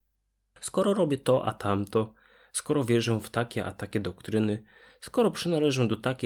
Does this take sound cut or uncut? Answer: uncut